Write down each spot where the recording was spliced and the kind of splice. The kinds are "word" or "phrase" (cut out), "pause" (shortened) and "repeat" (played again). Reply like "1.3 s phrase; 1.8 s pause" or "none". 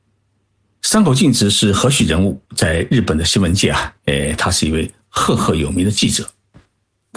2.5 s pause; 4.0 s pause